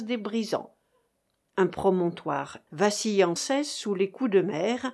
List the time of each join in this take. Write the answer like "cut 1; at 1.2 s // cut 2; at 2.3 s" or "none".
cut 1; at 2.7 s // cut 2; at 3.4 s